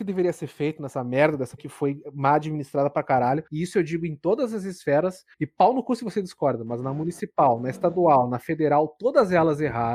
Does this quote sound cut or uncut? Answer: cut